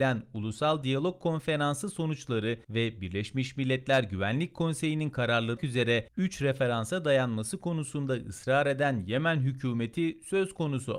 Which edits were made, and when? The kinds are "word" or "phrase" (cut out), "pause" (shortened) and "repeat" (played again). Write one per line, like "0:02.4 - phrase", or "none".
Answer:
0:02.6 - pause
0:05.6 - word

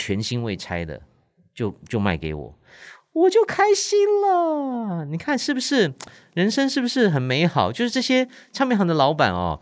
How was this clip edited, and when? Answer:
none

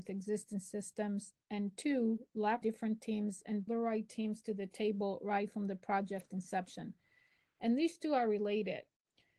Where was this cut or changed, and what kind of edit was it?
0:02.6 - phrase
0:03.7 - phrase

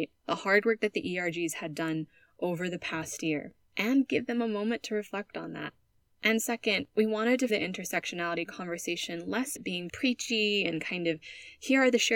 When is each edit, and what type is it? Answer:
0:03.6 - pause
0:06.0 - pause
0:06.9 - pause
0:07.5 - word
0:09.6 - word
0:09.9 - word

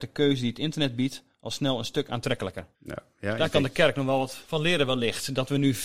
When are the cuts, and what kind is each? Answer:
0:02.7 - pause
0:04.4 - pause

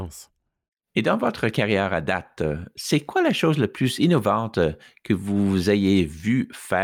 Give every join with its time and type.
none

